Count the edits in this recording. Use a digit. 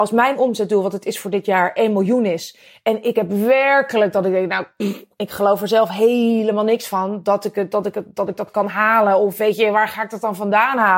0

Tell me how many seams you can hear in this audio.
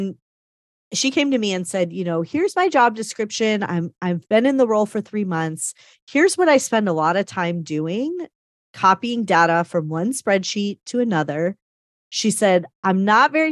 0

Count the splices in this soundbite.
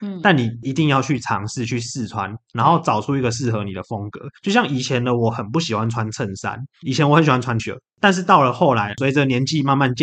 3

